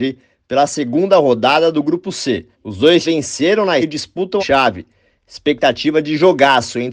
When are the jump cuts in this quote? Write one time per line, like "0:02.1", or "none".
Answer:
0:02.5
0:03.0
0:03.8
0:04.4